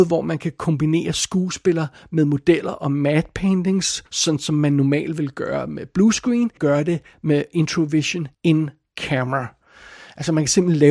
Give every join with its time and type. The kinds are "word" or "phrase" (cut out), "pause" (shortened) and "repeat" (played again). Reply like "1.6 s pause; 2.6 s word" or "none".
4.1 s pause; 6.6 s phrase; 8.3 s pause